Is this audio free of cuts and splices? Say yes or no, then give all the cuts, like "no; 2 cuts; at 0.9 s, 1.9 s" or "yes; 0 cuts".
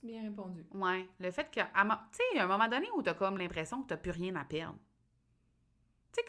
yes; 0 cuts